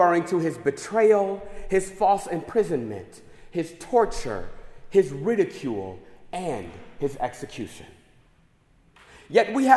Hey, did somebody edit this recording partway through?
no; 0 cuts

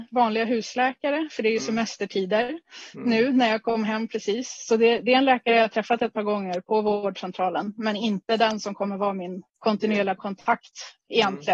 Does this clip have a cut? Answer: yes; 1 cut; at 9.5 s

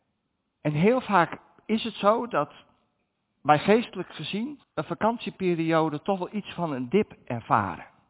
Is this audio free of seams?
no; 1 cut; at 4.6 s

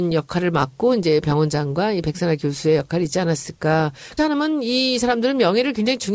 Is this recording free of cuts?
no; 1 cut; at 4.2 s

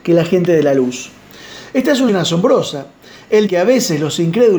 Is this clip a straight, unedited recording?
no; 2 cuts; at 2.1 s, 3.5 s

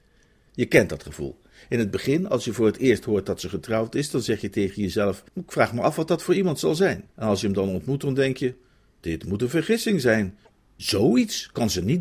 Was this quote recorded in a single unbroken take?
no; 2 cuts; at 5.3 s, 7.1 s

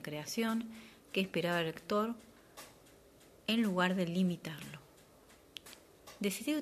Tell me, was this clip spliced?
no; 0 cuts

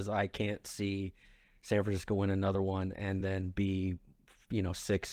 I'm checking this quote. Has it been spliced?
no; 0 cuts

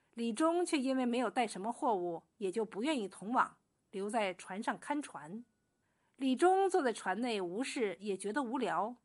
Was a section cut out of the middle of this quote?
yes; 1 cut; at 5.8 s

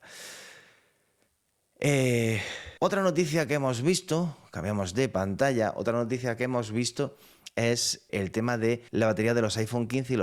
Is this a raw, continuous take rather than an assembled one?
no; 3 cuts; at 2.8 s, 8.1 s, 8.9 s

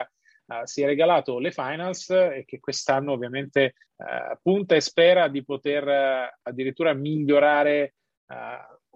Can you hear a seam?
yes; 1 cut; at 3.9 s

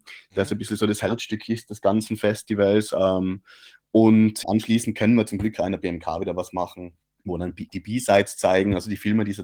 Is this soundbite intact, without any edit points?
no; 2 cuts; at 4.4 s, 7.0 s

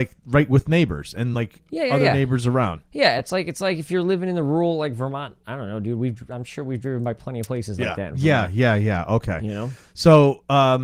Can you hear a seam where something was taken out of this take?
no; 0 cuts

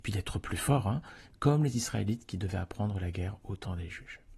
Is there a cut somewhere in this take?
no; 0 cuts

